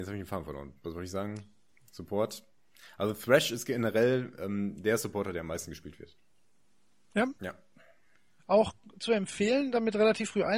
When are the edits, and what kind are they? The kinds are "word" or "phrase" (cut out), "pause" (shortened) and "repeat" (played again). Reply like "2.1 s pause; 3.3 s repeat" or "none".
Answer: 7.4 s pause